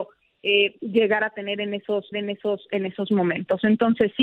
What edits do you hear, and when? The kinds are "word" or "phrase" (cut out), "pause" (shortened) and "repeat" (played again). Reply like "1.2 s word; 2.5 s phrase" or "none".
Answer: 2.1 s repeat